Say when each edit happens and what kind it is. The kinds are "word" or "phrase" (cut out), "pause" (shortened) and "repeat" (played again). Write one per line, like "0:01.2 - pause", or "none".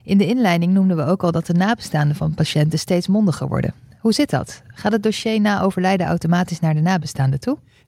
none